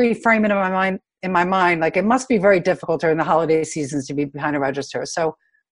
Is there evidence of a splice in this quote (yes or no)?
no